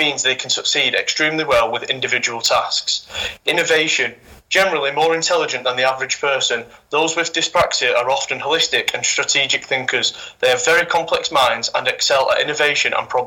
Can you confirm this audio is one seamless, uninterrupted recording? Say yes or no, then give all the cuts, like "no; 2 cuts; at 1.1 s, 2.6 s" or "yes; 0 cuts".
yes; 0 cuts